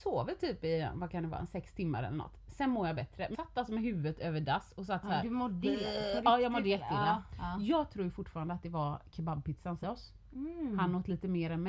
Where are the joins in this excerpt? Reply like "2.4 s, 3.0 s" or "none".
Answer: 3.3 s, 9.8 s